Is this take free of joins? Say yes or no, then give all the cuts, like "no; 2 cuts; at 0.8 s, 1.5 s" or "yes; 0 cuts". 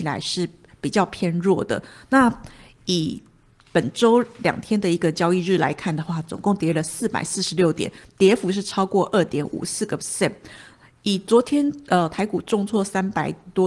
yes; 0 cuts